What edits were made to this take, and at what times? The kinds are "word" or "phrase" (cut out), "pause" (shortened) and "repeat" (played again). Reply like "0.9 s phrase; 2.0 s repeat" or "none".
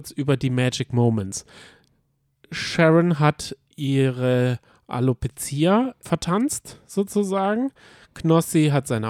6.0 s word